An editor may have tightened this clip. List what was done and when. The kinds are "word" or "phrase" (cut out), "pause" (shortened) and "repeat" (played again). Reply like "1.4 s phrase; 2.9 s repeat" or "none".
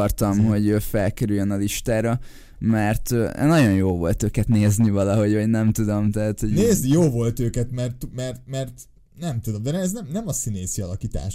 none